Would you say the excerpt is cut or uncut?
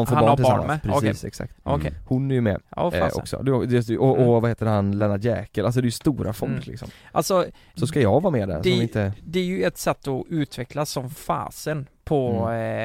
uncut